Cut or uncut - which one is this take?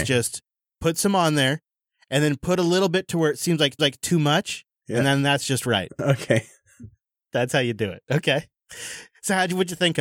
cut